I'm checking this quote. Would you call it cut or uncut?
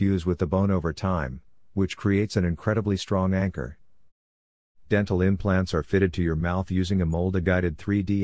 uncut